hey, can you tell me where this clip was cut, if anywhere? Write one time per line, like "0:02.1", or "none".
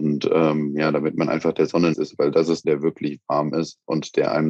0:01.9
0:02.6